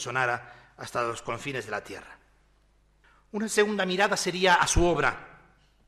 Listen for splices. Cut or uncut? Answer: uncut